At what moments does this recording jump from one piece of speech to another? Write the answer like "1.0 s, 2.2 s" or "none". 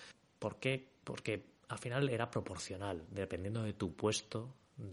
none